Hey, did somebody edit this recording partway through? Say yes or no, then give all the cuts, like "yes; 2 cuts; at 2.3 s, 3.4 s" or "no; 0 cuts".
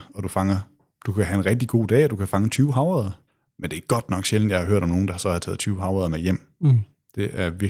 yes; 1 cut; at 3.3 s